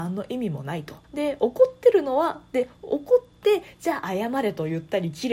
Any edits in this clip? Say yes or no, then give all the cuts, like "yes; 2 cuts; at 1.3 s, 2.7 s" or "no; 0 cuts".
yes; 1 cut; at 1.0 s